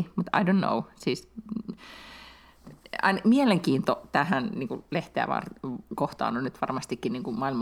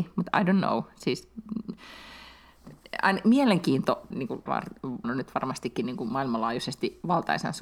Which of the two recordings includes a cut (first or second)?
second